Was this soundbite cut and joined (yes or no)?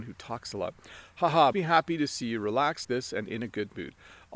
yes